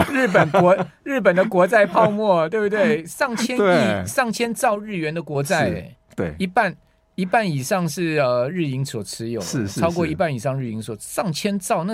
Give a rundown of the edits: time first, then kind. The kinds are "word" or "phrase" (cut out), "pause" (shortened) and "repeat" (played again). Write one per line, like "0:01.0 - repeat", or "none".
none